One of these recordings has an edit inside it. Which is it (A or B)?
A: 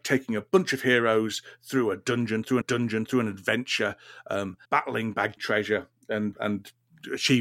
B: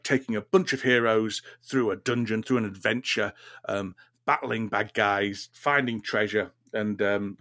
A